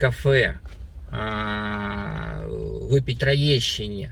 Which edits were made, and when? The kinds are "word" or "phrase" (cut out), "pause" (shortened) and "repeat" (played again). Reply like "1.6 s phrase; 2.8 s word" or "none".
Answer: 3.2 s phrase